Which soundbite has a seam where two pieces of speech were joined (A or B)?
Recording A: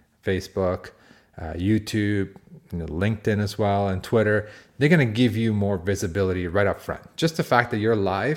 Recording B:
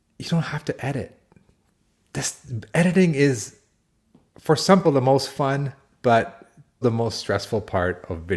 B